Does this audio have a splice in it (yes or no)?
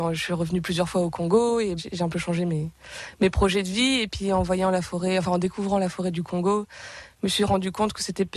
yes